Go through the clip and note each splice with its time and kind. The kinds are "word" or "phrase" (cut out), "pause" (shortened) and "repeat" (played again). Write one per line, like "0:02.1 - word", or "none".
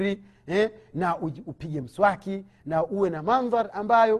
none